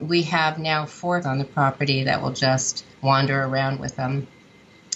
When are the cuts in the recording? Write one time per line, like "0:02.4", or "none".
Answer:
0:01.2
0:02.9